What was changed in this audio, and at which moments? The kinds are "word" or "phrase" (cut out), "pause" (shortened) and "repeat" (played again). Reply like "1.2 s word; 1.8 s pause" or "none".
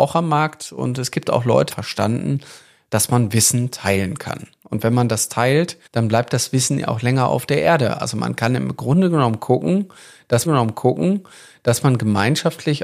1.7 s phrase; 5.9 s pause; 10.5 s repeat